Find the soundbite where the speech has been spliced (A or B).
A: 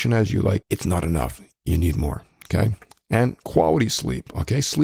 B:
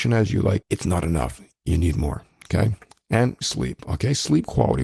B